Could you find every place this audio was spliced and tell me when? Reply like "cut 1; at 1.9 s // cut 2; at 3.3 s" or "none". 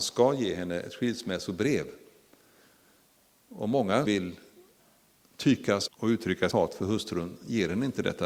cut 1; at 4.1 s // cut 2; at 5.9 s // cut 3; at 6.5 s